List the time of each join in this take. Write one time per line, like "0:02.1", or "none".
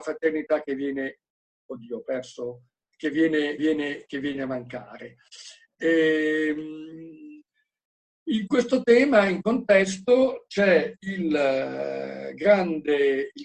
0:02.8
0:03.6
0:09.4

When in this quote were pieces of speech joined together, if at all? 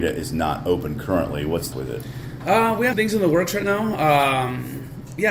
0:01.7
0:02.9

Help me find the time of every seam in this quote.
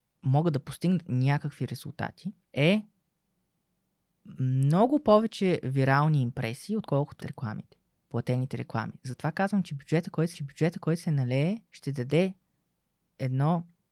0:02.4
0:07.2
0:07.9
0:10.3
0:11.7

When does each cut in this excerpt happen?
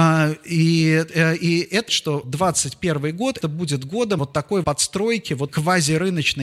0:01.1
0:01.9
0:02.2
0:03.4
0:04.2
0:04.6
0:05.5

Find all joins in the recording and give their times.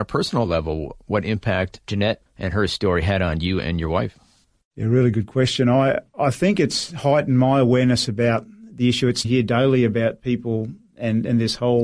0:09.2

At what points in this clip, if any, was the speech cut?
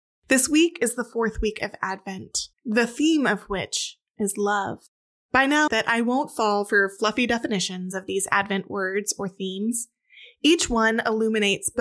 0:02.5
0:04.9
0:05.7

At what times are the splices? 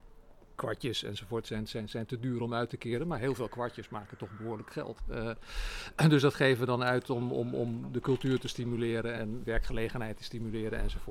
0:09.2

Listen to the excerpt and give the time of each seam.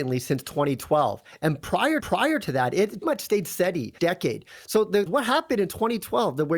0:02.0
0:03.0
0:04.0
0:05.1

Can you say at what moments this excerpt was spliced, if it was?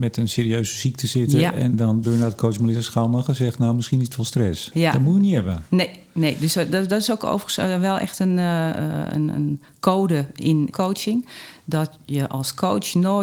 0:02.0
0:10.7

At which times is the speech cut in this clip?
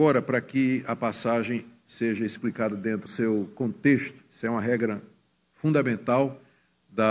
0:03.1

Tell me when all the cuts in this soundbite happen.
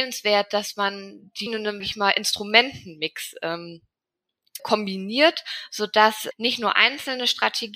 0:01.5
0:01.8
0:04.6
0:06.3

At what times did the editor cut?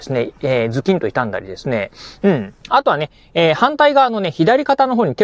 0:02.6

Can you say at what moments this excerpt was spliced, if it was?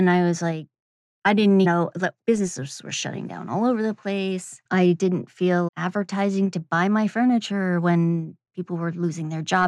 0:01.6
0:02.2
0:04.7
0:05.7
0:08.5

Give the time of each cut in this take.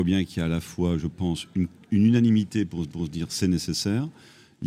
0:02.9

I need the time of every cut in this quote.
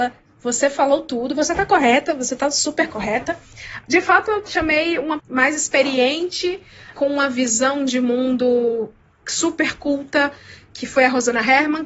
0:05.2

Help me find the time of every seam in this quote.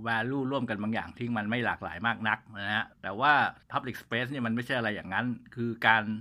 0:02.9
0:03.6

